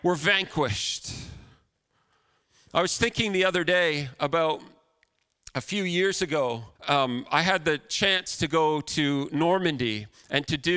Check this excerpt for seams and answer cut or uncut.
cut